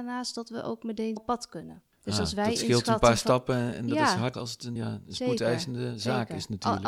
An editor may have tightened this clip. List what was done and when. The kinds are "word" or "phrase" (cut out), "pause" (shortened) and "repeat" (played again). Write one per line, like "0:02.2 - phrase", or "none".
0:01.2 - word
0:04.3 - word
0:04.8 - word